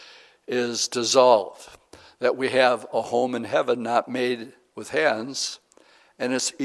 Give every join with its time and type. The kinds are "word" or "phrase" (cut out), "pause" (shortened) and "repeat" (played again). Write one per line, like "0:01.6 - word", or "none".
none